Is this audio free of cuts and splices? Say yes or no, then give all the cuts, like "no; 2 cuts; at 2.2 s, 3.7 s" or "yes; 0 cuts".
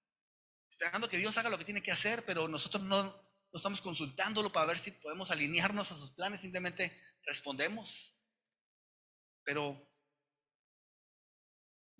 yes; 0 cuts